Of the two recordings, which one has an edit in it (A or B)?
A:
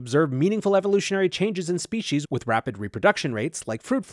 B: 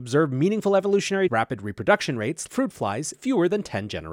B